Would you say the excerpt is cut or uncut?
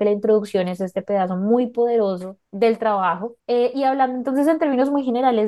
cut